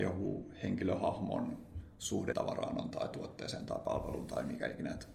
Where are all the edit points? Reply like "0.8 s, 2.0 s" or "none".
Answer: 2.3 s, 2.9 s